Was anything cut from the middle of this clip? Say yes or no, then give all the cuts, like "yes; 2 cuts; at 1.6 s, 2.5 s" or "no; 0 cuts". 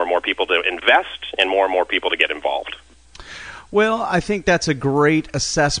no; 0 cuts